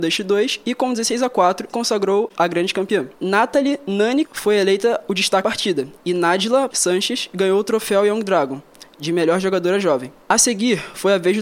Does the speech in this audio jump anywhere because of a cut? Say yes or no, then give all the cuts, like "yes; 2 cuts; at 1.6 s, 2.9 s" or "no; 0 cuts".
yes; 6 cuts; at 1.7 s, 3.1 s, 4.2 s, 5.4 s, 6.0 s, 6.7 s